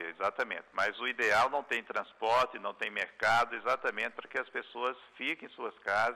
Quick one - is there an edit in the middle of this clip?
no; 0 cuts

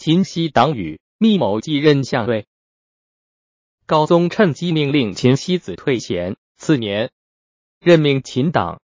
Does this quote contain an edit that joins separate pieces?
yes; 1 cut; at 6.5 s

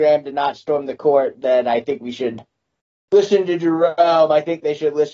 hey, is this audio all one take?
yes; 0 cuts

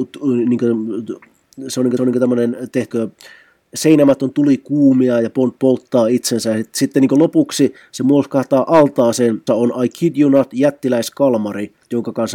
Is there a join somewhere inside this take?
yes; 3 cuts; at 2.0 s, 2.9 s, 9.5 s

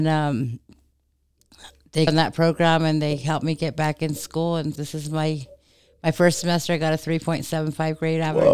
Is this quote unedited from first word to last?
no; 2 cuts; at 2.1 s, 4.8 s

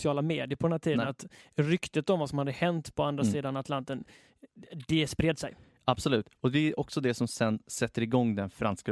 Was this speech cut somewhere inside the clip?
no; 0 cuts

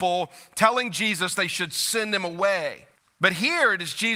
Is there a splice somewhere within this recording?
yes; 1 cut; at 3.0 s

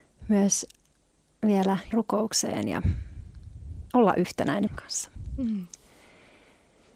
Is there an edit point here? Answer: yes; 3 cuts; at 1.9 s, 3.9 s, 4.7 s

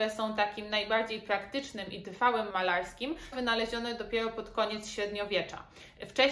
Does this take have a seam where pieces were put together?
yes; 2 cuts; at 2.5 s, 3.3 s

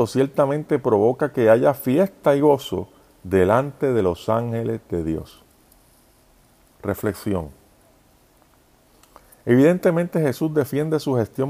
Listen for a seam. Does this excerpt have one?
no; 0 cuts

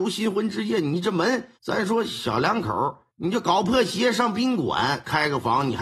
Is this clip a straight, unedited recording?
no; 2 cuts; at 1.6 s, 3.1 s

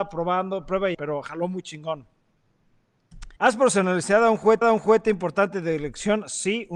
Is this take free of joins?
no; 3 cuts; at 0.9 s, 3.4 s, 4.6 s

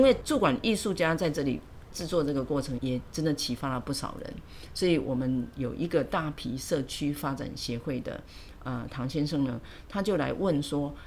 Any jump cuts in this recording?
no; 0 cuts

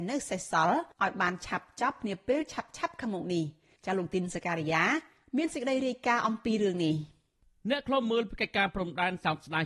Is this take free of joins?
no; 1 cut; at 0.9 s

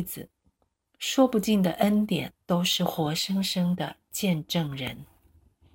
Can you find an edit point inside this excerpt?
yes; 1 cut; at 2.4 s

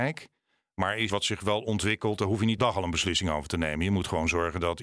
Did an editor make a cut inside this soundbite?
yes; 2 cuts; at 1.1 s, 2.6 s

